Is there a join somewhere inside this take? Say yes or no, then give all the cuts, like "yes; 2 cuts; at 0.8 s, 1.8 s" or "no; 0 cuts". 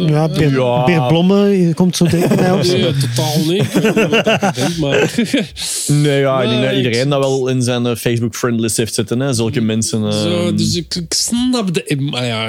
no; 0 cuts